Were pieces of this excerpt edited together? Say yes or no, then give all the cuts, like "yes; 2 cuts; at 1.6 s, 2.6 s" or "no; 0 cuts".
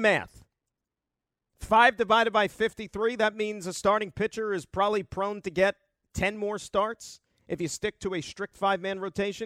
no; 0 cuts